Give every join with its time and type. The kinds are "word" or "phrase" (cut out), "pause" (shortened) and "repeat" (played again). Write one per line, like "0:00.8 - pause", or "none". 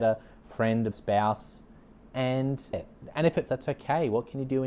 0:00.9 - word
0:02.7 - word
0:03.5 - word